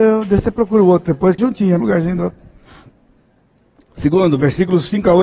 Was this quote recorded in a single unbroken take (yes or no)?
no